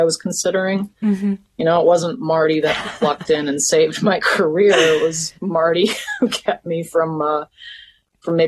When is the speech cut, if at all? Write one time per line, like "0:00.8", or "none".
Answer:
0:05.4